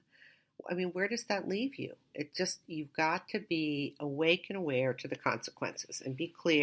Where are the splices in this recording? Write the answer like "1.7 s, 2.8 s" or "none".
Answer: none